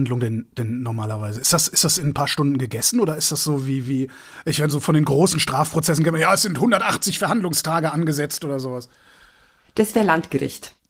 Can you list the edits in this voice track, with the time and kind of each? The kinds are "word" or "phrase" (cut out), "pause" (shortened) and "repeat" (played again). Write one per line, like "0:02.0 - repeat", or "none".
none